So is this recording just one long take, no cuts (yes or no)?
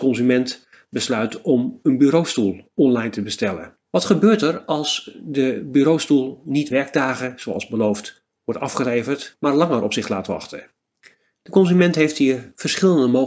no